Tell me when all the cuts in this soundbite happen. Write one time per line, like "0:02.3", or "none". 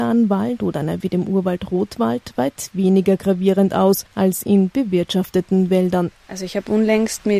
0:01.0
0:04.1
0:06.2